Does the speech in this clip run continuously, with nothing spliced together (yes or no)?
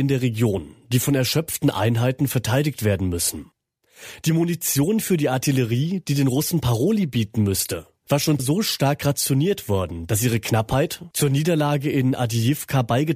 no